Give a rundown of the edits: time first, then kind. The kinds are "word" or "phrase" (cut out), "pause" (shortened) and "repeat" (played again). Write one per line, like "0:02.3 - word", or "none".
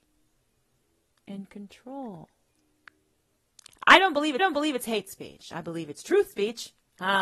0:04.4 - repeat